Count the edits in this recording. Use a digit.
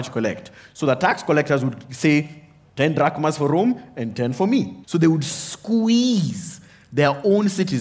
1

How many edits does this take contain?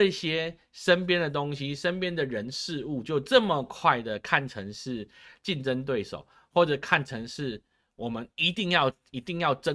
0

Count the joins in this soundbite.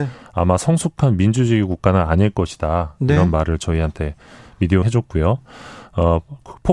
1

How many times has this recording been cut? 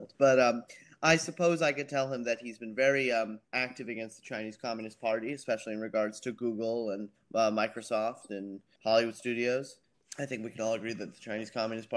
1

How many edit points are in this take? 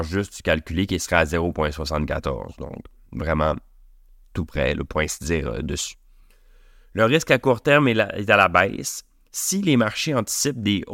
0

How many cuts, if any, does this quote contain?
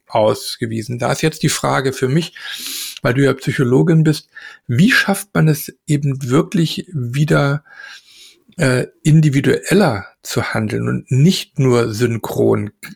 0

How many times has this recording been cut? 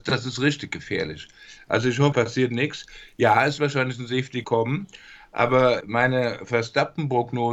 4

